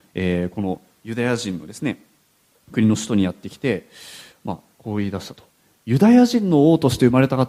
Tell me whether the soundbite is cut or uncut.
uncut